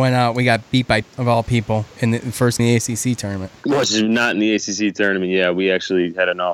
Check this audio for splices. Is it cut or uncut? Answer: cut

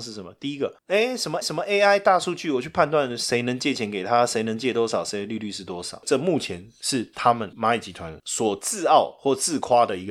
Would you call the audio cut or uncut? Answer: cut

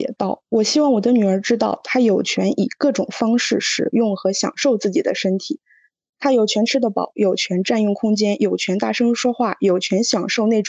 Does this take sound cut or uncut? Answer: uncut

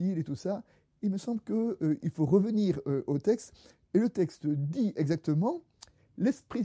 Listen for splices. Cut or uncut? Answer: uncut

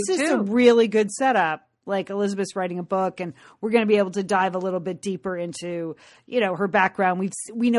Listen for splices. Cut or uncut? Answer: uncut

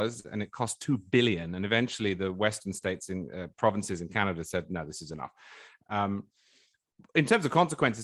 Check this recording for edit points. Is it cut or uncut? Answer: uncut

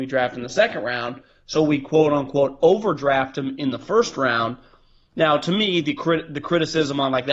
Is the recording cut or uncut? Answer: uncut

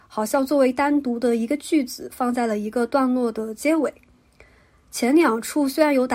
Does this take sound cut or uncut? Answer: uncut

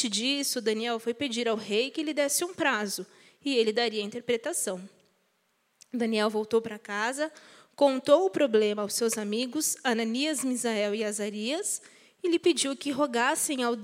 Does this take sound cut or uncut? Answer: uncut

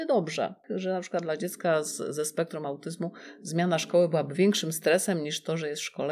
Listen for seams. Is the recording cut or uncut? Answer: uncut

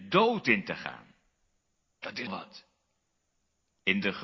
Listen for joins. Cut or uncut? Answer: cut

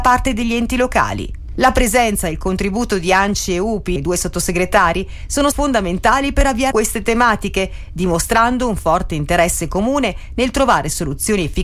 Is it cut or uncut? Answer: cut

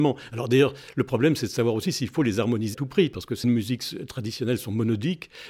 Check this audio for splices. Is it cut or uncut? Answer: cut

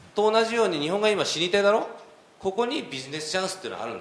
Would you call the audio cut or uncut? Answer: uncut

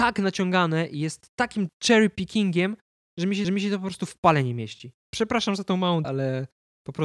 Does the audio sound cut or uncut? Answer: cut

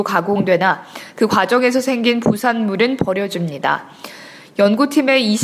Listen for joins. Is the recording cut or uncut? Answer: uncut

